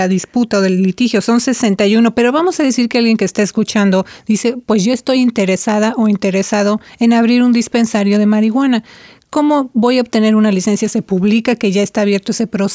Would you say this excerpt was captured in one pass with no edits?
yes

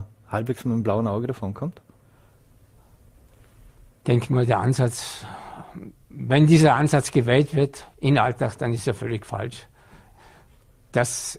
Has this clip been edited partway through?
no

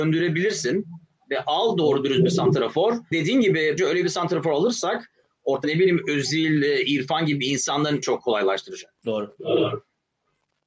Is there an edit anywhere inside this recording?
yes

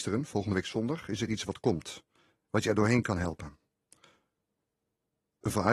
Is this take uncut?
yes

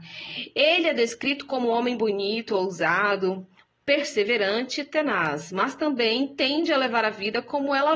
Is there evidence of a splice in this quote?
no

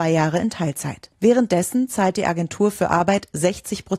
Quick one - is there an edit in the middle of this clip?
yes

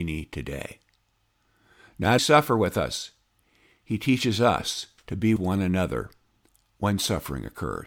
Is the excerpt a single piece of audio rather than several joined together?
no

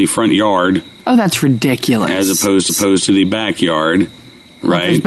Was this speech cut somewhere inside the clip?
yes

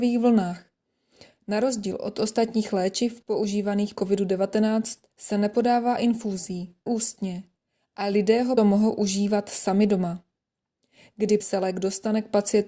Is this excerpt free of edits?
no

